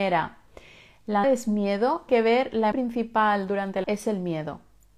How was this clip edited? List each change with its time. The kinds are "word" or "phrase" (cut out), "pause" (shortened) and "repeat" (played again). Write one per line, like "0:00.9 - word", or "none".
0:01.2 - word
0:02.1 - word
0:02.7 - word
0:03.8 - word